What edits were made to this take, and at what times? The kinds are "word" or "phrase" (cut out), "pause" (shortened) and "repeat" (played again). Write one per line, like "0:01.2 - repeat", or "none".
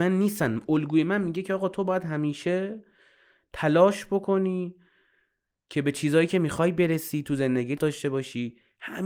0:07.8 - word